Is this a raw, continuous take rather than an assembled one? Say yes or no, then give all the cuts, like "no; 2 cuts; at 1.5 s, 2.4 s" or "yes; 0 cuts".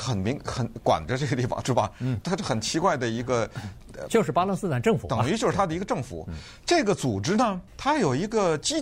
no; 3 cuts; at 2.2 s, 4.1 s, 7.7 s